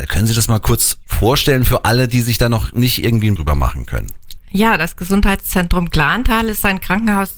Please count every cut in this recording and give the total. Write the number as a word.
one